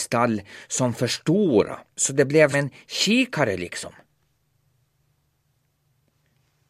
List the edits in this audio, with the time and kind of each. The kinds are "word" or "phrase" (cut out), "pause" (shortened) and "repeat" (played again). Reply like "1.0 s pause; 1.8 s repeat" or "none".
1.9 s pause; 2.5 s word